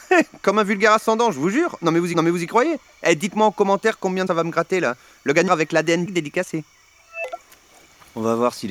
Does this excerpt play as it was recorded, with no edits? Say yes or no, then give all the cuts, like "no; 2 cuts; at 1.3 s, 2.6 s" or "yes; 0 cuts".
no; 4 cuts; at 2.1 s, 4.3 s, 5.5 s, 6.1 s